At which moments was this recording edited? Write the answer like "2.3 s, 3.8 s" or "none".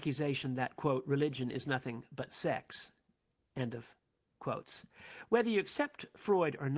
none